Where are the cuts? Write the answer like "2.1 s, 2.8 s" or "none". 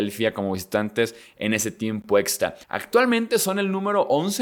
2.6 s